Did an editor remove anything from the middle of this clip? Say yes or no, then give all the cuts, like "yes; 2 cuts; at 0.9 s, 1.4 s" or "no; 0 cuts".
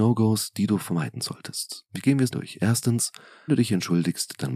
yes; 2 cuts; at 2.3 s, 3.5 s